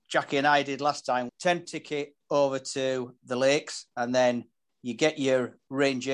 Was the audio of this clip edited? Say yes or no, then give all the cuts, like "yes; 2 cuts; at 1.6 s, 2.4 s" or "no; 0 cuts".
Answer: yes; 3 cuts; at 1.3 s, 1.7 s, 3.2 s